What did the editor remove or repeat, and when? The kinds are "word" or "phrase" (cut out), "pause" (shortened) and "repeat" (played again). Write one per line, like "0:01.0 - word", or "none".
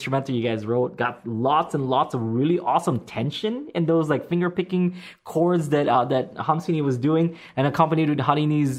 none